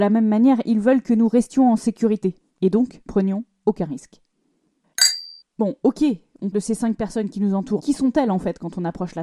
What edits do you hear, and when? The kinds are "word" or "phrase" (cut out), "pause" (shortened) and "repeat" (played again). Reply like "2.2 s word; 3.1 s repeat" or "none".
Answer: 2.4 s pause; 3.1 s phrase; 5.4 s pause; 6.5 s word; 7.8 s word

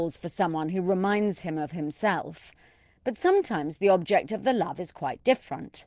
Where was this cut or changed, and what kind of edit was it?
none

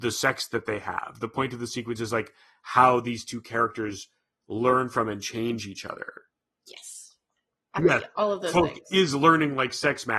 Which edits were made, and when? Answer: 7.8 s word

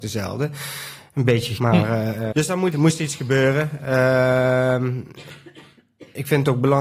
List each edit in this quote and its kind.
1.6 s word; 2.3 s word; 2.7 s word

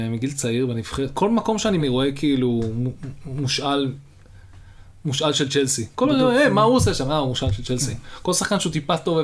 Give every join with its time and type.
1.8 s word

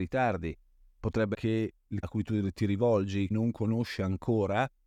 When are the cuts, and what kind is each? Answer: 1.3 s word; 2.0 s word; 3.3 s word

